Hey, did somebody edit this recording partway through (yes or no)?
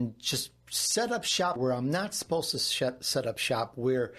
yes